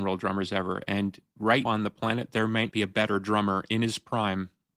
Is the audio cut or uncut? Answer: cut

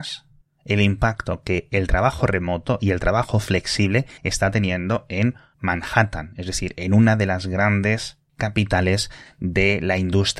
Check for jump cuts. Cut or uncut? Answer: cut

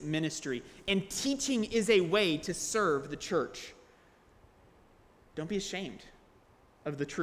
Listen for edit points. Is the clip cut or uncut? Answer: uncut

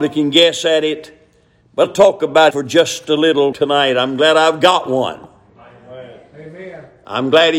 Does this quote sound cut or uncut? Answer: cut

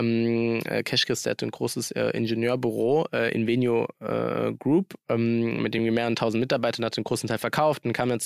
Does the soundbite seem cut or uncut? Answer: uncut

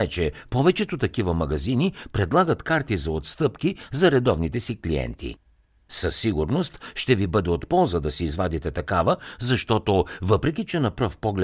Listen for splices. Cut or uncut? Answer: uncut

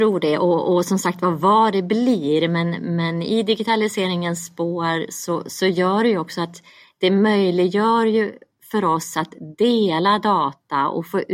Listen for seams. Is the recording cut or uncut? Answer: uncut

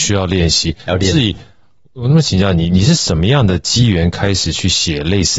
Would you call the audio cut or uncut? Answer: uncut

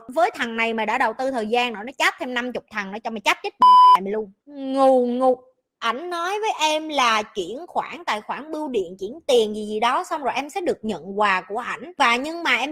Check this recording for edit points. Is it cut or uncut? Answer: uncut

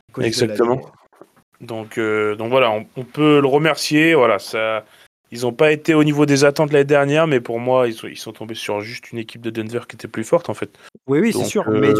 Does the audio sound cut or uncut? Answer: uncut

